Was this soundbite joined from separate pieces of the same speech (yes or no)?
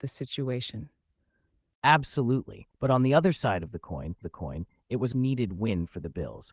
yes